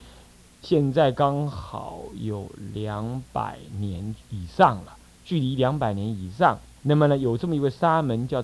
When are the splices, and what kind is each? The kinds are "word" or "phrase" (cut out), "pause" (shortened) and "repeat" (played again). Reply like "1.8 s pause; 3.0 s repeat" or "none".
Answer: 4.2 s pause; 6.8 s pause